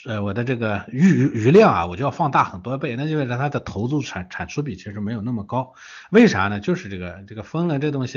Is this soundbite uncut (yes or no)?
yes